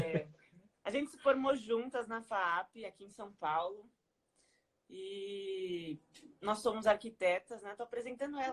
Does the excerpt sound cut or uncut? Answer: uncut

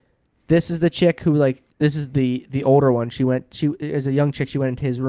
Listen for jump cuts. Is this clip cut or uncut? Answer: cut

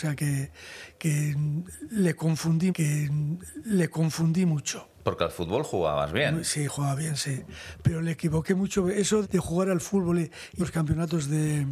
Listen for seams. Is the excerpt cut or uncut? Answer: cut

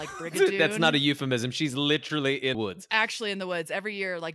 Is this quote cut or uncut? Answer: cut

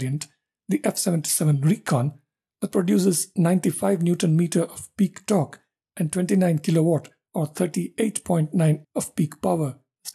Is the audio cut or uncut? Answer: cut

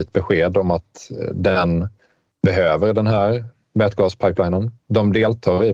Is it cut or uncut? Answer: uncut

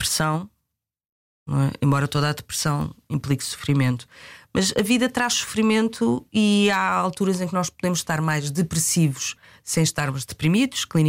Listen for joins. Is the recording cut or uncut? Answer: uncut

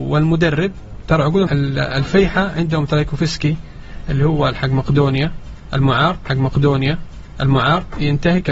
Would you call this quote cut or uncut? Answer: cut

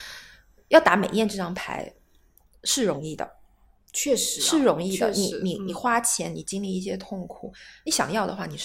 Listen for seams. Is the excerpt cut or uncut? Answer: uncut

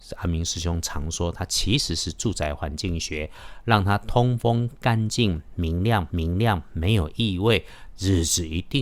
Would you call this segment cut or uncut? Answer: cut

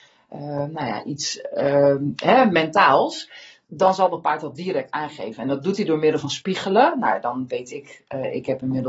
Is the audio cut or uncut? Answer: uncut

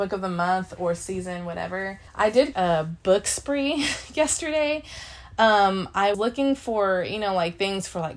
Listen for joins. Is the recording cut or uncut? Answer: cut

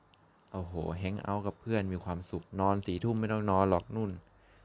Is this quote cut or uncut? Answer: cut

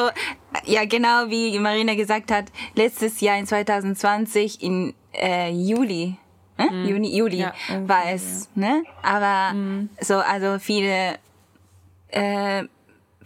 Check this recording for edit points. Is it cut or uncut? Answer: uncut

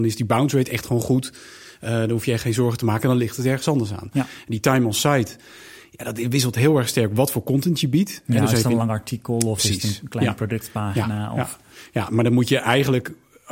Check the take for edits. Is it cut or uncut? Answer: uncut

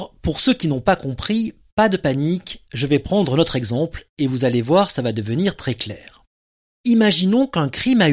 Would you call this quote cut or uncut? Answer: uncut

